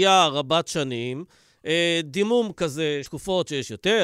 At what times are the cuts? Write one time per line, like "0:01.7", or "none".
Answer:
0:03.0